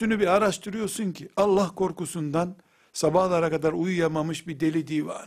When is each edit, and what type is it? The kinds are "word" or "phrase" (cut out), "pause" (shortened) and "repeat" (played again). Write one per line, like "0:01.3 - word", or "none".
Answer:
none